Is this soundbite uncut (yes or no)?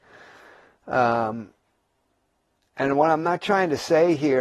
yes